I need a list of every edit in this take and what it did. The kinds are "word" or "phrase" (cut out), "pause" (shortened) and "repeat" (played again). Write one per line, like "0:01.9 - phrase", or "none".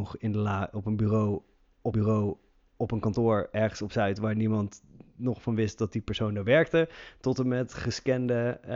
0:01.9 - repeat